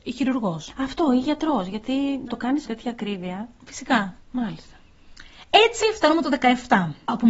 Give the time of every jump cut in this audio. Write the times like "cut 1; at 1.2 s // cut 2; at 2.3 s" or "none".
cut 1; at 2.3 s // cut 2; at 2.7 s // cut 3; at 4.2 s